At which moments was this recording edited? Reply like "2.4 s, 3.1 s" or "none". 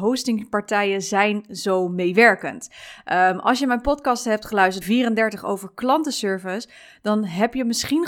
4.8 s